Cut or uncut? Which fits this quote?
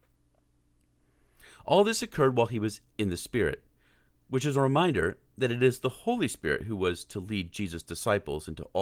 uncut